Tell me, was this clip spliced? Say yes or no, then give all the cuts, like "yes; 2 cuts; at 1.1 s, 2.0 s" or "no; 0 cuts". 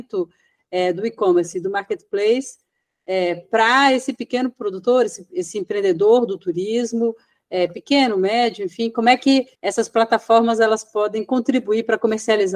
yes; 1 cut; at 9.5 s